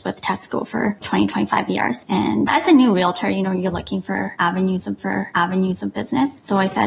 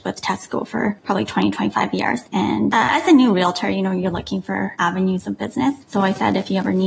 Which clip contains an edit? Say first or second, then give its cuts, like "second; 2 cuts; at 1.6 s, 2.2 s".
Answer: first; 3 cuts; at 1.0 s, 2.5 s, 5.0 s